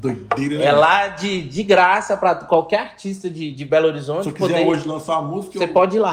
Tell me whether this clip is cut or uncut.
uncut